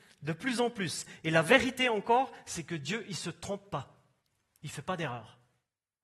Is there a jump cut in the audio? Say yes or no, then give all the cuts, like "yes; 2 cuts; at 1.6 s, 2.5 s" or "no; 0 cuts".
no; 0 cuts